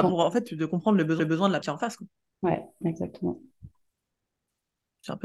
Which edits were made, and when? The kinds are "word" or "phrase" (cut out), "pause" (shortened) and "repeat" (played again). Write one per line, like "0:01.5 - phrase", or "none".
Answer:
0:01.2 - repeat
0:01.6 - word